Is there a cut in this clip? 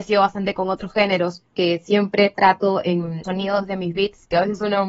yes; 2 cuts; at 1.5 s, 3.2 s

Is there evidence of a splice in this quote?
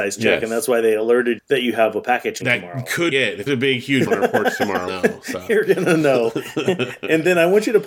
yes; 6 cuts; at 1.4 s, 2.4 s, 3.1 s, 3.5 s, 4.1 s, 4.9 s

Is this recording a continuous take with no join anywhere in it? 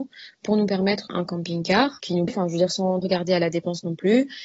no; 3 cuts; at 1.1 s, 2.3 s, 3.0 s

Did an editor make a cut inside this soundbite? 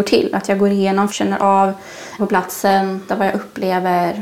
yes; 3 cuts; at 1.1 s, 2.2 s, 3.1 s

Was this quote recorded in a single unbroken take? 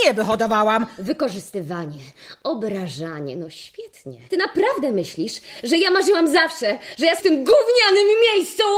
no; 2 cuts; at 4.3 s, 7.2 s

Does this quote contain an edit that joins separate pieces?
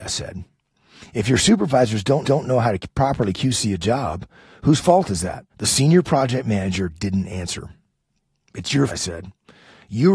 yes; 3 cuts; at 2.2 s, 5.5 s, 8.9 s

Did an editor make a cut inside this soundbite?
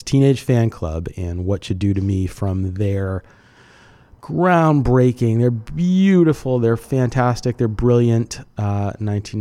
no; 0 cuts

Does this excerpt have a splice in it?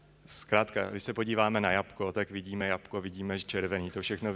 no; 0 cuts

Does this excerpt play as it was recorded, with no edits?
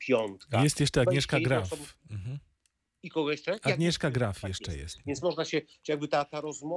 yes; 0 cuts

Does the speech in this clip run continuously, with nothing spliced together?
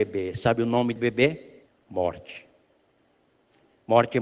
no; 2 cuts; at 1.0 s, 1.7 s

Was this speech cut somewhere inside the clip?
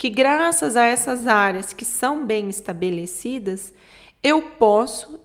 no; 0 cuts

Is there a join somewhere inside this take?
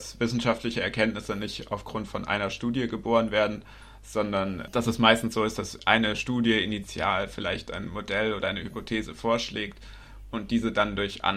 no; 0 cuts

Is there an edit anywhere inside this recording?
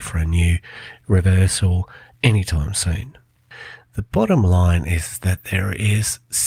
no; 0 cuts

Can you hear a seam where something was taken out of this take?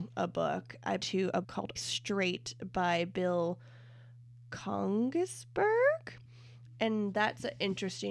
yes; 3 cuts; at 1.0 s, 1.4 s, 1.8 s

